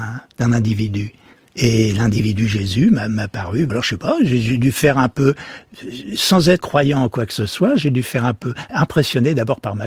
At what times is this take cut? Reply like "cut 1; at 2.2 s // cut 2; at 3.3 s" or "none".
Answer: cut 1; at 3.7 s